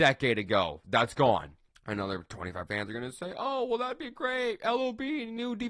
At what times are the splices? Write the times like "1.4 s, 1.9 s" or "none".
1.7 s, 2.7 s